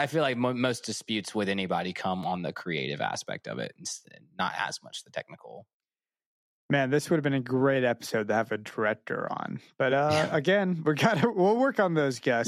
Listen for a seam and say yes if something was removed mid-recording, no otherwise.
no